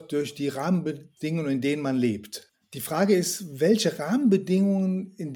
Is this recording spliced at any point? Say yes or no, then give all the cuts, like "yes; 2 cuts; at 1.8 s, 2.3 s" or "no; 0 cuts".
no; 0 cuts